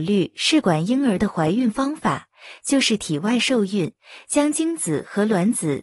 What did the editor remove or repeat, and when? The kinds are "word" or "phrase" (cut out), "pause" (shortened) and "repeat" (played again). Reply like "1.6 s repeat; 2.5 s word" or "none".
none